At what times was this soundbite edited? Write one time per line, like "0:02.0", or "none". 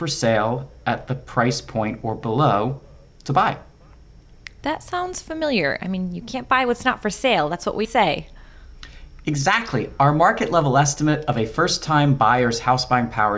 0:07.8